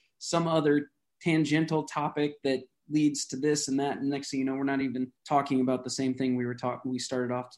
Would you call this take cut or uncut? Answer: uncut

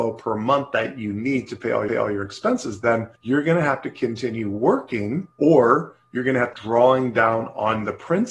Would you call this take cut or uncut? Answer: cut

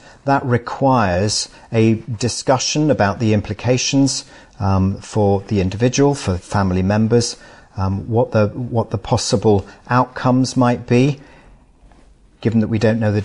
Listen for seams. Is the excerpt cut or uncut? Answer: uncut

